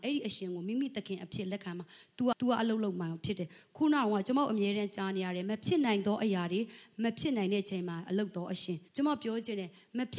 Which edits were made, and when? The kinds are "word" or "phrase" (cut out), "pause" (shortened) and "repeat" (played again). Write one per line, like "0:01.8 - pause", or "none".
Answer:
0:02.3 - repeat
0:08.9 - pause